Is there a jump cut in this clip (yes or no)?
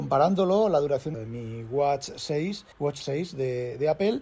yes